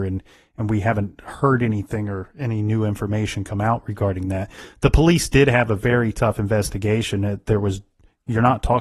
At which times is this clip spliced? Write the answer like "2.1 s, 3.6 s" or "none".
none

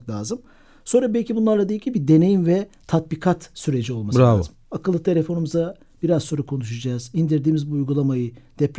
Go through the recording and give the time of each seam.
none

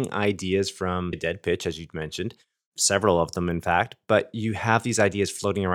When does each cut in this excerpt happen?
1.1 s

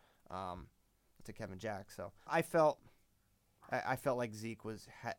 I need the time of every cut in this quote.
1.2 s, 2.3 s

